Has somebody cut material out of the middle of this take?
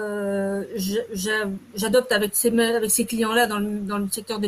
no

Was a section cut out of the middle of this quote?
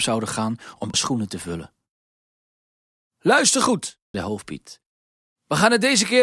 yes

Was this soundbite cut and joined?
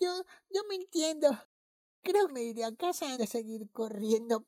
yes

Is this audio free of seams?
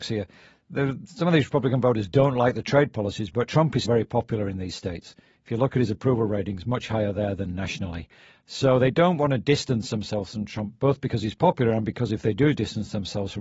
no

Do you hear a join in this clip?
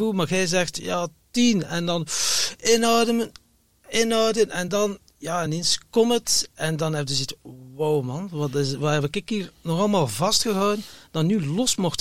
no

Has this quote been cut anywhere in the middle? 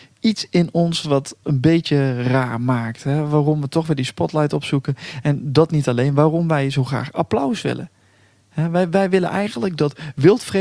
yes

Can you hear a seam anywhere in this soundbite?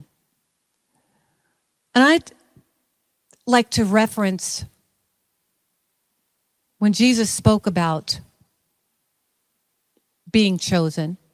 no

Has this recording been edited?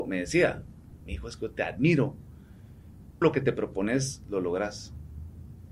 yes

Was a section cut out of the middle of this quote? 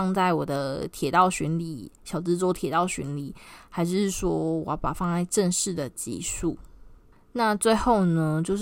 yes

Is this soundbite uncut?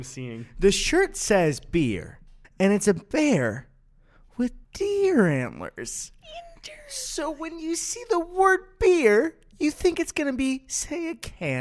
no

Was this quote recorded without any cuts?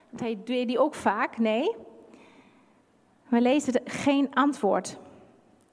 yes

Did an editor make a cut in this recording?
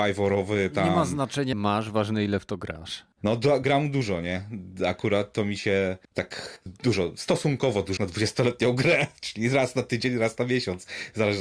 yes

